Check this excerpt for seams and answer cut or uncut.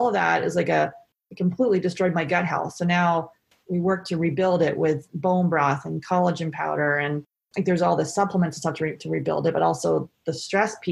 uncut